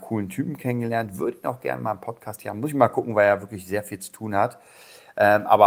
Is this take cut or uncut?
uncut